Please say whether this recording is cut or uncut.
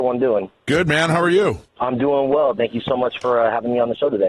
cut